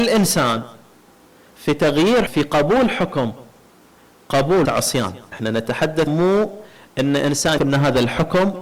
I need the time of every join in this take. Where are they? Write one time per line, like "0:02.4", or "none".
0:02.3
0:04.7
0:05.3
0:06.1
0:07.6